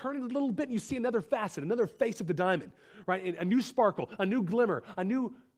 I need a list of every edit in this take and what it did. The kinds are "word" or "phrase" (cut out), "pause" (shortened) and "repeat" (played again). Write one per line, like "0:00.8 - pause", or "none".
none